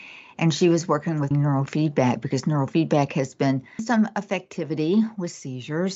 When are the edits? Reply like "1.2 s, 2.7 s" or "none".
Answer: 1.3 s, 3.8 s